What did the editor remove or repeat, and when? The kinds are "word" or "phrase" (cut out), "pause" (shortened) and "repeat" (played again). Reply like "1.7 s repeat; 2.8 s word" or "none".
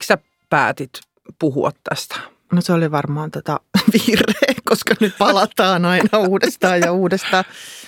5.2 s word